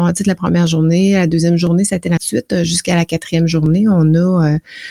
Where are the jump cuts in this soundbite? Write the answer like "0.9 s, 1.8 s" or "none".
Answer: 2.2 s